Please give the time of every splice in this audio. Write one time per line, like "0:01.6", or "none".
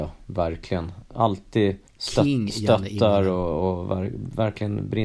0:01.9